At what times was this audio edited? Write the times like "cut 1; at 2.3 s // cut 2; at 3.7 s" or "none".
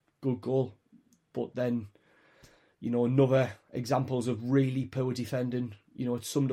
none